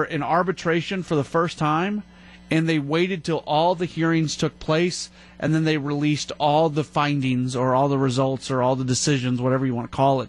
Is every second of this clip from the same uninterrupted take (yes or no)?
yes